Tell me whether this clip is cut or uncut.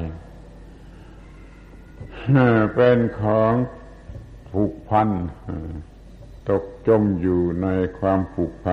cut